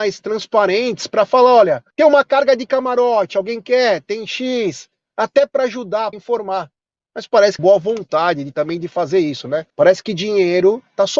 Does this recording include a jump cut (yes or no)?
yes